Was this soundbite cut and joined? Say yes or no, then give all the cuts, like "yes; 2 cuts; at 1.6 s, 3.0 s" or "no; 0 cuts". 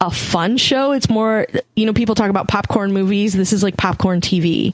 no; 0 cuts